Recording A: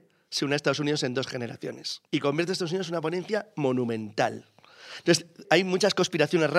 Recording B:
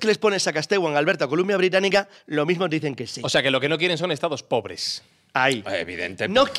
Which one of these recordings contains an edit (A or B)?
A